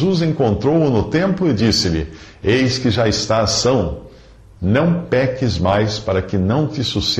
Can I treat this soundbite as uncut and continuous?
yes; 0 cuts

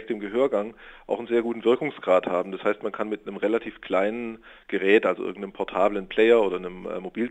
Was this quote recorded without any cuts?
yes; 0 cuts

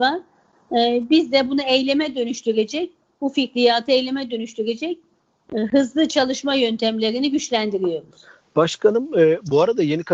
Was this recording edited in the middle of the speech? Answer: no; 0 cuts

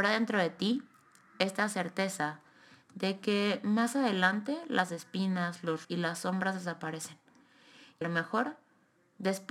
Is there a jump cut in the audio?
yes; 2 cuts; at 5.8 s, 8.0 s

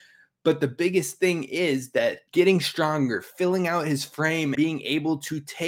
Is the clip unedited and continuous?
no; 2 cuts; at 2.3 s, 4.5 s

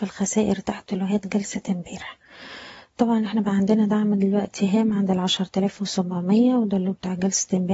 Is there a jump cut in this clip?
no; 0 cuts

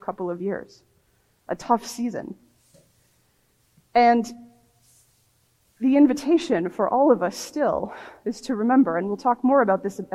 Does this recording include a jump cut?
no; 0 cuts

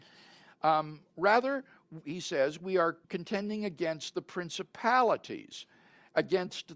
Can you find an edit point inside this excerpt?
yes; 1 cut; at 3.0 s

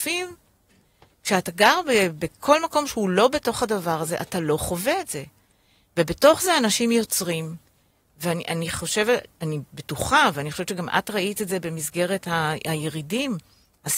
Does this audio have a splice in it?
no; 0 cuts

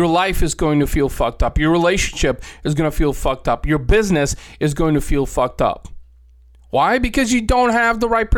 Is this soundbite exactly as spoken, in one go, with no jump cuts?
yes; 0 cuts

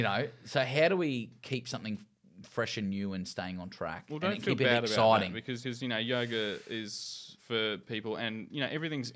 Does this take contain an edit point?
yes; 2 cuts; at 5.6 s, 7.4 s

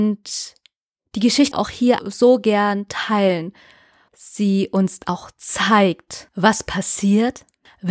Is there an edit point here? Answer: yes; 3 cuts; at 1.5 s, 2.0 s, 4.1 s

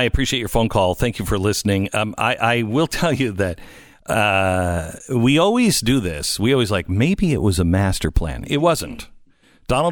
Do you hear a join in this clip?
no; 0 cuts

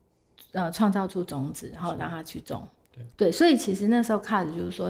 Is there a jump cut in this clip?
yes; 1 cut; at 3.1 s

